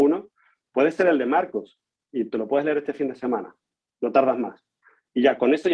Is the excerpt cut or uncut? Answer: uncut